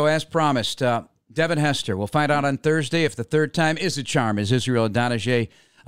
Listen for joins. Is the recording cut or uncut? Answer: uncut